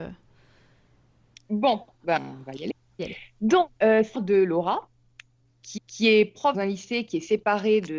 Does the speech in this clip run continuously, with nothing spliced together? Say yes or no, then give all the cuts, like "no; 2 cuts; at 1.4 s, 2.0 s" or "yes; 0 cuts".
no; 6 cuts; at 2.2 s, 3.0 s, 3.8 s, 4.1 s, 5.8 s, 6.5 s